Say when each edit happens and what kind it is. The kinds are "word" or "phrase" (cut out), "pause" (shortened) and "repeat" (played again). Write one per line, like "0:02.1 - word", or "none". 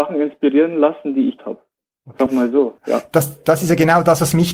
0:01.4 - word
0:02.3 - word
0:02.8 - pause